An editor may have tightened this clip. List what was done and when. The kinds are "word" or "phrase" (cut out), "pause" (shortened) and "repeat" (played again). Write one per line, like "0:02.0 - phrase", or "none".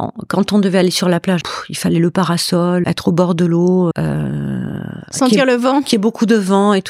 0:01.4 - word
0:02.8 - word
0:03.9 - word